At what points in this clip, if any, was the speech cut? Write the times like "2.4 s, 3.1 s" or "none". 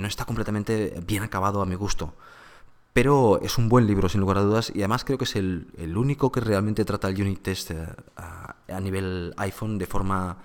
none